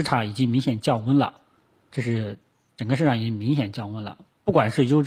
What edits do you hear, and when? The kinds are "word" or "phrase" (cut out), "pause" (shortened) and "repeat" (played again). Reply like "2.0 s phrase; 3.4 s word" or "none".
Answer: 1.9 s word